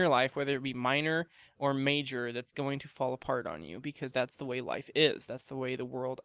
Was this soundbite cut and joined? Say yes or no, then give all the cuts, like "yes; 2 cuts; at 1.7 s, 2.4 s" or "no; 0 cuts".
no; 0 cuts